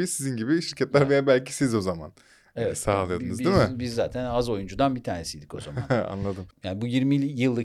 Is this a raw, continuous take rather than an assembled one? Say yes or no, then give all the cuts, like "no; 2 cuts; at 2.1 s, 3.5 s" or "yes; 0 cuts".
yes; 0 cuts